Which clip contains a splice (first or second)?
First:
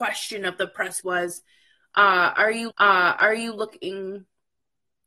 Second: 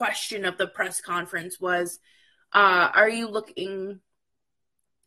first